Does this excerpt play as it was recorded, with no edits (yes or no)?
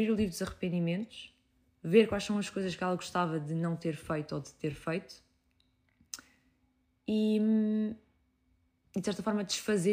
yes